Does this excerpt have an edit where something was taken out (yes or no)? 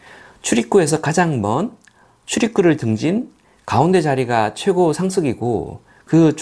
no